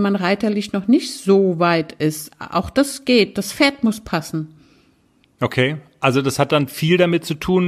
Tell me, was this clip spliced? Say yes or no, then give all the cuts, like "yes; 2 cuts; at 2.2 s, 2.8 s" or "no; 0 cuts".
no; 0 cuts